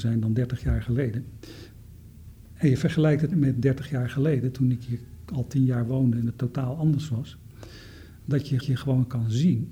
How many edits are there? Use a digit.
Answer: 2